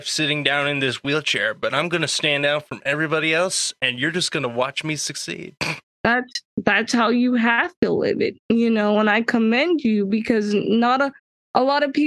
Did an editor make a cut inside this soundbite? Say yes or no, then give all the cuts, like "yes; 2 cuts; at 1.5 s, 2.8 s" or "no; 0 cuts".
yes; 2 cuts; at 5.6 s, 8.4 s